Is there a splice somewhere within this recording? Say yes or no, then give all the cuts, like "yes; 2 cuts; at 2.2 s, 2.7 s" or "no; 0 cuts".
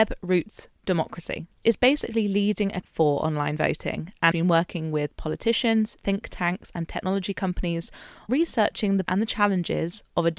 yes; 6 cuts; at 1.6 s, 2.8 s, 4.3 s, 6.0 s, 8.3 s, 9.1 s